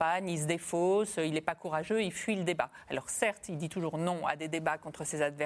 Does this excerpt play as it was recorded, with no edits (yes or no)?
yes